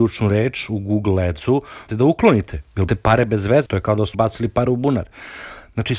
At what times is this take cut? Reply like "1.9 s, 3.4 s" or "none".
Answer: 1.9 s, 2.9 s, 3.7 s, 4.1 s